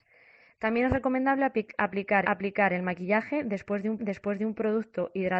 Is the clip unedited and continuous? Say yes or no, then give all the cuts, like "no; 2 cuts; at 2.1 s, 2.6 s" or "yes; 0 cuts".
no; 2 cuts; at 2.2 s, 4.0 s